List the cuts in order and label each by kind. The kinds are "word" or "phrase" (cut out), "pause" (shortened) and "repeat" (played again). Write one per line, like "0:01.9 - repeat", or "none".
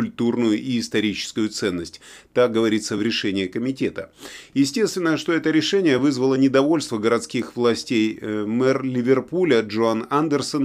none